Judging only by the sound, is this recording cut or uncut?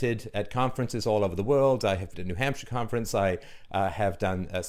cut